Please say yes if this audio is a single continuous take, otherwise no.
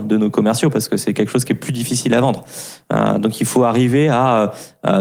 yes